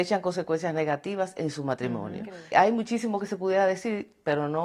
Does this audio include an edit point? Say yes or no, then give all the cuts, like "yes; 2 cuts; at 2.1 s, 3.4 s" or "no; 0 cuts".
yes; 1 cut; at 2.5 s